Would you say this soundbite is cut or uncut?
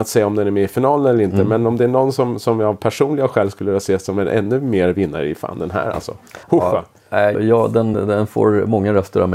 cut